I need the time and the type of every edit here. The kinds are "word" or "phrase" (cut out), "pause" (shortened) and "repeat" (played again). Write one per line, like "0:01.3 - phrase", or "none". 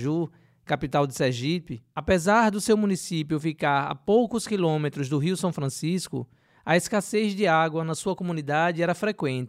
none